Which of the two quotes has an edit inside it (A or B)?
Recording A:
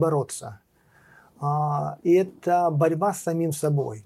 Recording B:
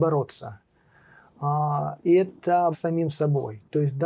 B